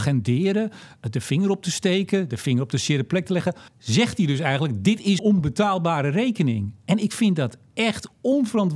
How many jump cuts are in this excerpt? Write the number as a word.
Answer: two